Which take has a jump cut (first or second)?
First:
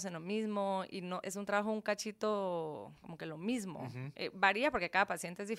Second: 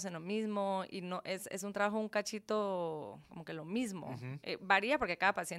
first